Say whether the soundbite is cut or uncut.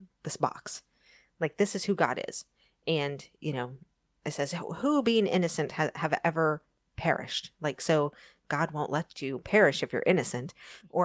uncut